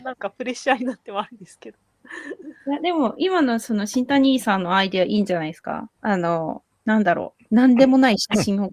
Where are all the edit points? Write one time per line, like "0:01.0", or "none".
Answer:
0:02.6
0:06.0
0:06.7